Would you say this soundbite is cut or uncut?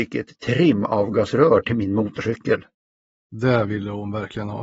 uncut